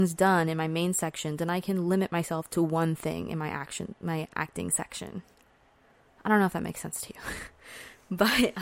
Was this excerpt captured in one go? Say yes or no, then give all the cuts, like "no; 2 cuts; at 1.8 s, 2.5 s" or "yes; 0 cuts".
yes; 0 cuts